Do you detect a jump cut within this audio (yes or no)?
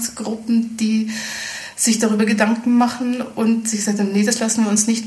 no